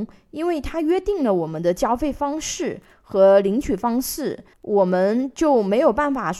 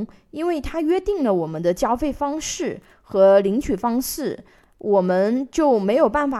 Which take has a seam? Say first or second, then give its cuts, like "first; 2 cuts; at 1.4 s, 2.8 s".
first; 1 cut; at 4.5 s